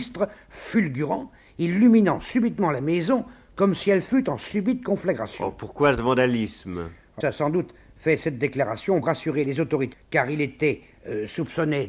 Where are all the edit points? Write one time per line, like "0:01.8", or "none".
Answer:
0:07.2
0:09.0
0:09.9